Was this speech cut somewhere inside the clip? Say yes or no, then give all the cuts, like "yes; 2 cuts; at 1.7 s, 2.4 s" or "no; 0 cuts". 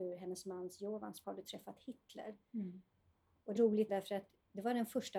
yes; 3 cuts; at 1.2 s, 3.6 s, 3.9 s